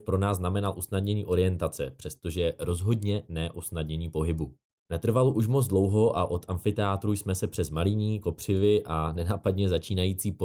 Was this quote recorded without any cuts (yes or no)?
yes